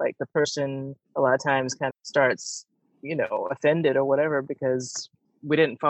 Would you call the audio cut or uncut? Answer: cut